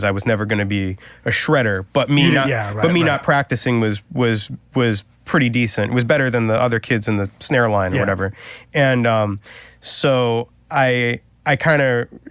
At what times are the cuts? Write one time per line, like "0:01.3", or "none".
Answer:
none

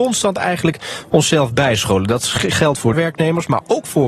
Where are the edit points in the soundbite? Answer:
0:02.9

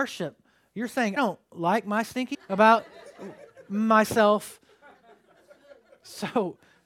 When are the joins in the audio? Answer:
0:01.2
0:02.3

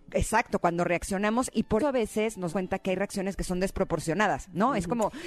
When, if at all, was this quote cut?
0:01.8
0:02.5

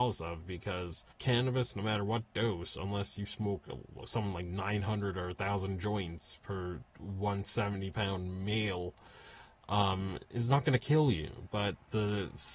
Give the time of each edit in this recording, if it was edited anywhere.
0:01.1

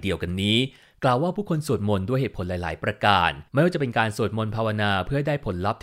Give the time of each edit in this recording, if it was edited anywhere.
0:03.5

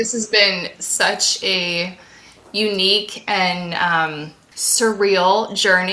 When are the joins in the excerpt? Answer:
none

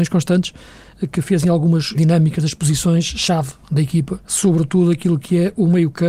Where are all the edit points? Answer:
0:01.1
0:01.9
0:04.2

